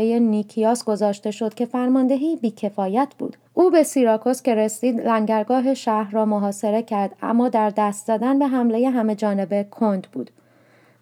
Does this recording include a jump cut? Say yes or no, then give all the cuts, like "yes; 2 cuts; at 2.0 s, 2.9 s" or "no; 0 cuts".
yes; 1 cut; at 3.5 s